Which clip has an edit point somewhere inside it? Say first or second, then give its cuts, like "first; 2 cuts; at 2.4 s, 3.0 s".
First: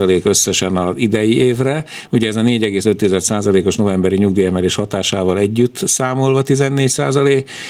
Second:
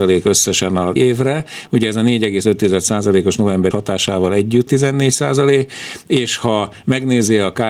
second; 3 cuts; at 1.0 s, 3.7 s, 4.7 s